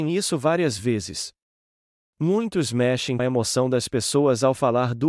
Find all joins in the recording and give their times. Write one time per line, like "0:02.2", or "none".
0:03.2